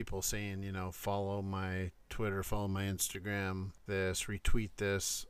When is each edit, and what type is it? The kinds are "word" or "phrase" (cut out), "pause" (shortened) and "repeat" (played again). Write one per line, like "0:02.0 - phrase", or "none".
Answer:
0:03.9 - word